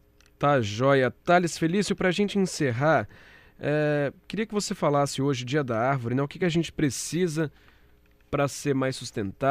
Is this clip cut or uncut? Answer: uncut